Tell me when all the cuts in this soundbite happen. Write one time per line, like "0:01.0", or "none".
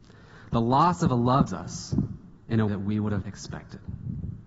0:01.5
0:02.4
0:02.7
0:03.2